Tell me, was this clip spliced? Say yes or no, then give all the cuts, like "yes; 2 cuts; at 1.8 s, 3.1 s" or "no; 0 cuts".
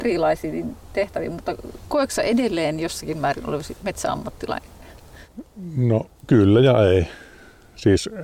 yes; 1 cut; at 6.2 s